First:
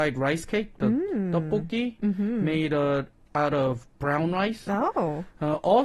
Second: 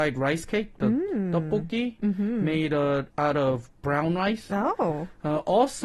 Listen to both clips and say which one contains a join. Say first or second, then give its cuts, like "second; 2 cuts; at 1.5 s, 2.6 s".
second; 1 cut; at 3.1 s